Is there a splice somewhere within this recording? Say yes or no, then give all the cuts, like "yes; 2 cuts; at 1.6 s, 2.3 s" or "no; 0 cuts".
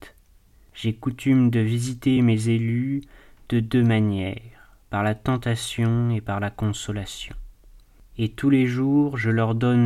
no; 0 cuts